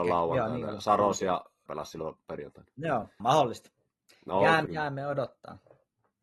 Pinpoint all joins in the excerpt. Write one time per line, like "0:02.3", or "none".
0:01.7
0:03.2
0:04.7